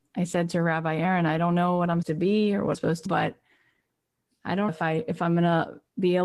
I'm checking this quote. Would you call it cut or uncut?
cut